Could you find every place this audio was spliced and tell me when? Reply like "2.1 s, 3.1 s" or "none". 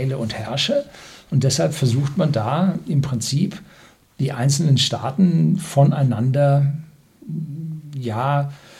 none